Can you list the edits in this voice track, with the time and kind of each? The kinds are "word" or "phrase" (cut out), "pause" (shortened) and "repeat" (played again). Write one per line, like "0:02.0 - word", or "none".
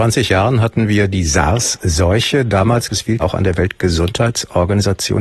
0:02.9 - word
0:03.2 - phrase